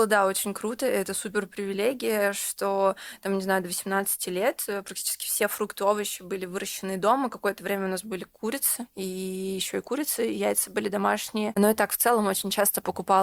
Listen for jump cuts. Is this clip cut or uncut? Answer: uncut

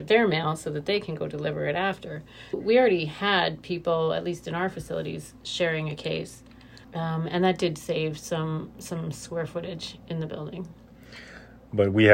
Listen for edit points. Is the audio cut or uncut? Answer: cut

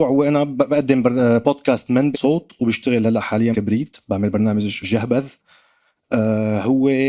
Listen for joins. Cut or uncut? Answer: cut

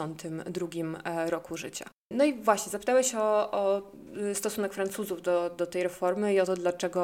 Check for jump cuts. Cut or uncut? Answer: uncut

